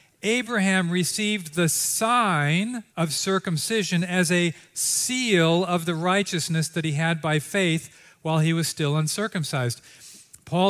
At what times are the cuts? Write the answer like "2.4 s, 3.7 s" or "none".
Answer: 2.9 s